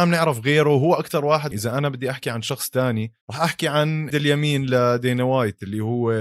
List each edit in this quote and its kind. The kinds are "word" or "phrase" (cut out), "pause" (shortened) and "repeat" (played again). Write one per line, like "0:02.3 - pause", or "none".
0:01.5 - phrase
0:03.2 - pause
0:04.1 - word